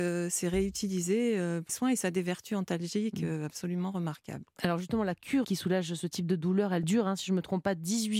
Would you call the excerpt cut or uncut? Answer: cut